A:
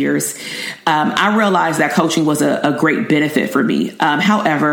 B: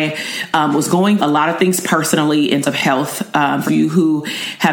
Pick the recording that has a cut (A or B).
B